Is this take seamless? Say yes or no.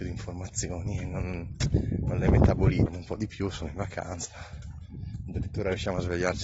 yes